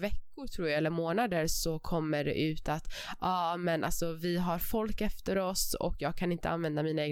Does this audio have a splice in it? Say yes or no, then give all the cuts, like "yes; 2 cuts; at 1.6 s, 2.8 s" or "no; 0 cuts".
no; 0 cuts